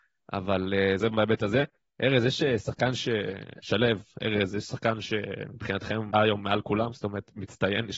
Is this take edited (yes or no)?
yes